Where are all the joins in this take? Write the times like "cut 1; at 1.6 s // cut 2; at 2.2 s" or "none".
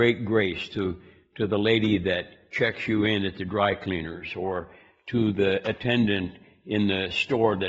none